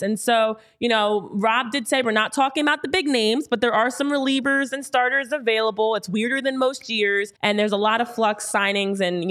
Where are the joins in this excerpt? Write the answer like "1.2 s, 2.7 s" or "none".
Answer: 7.4 s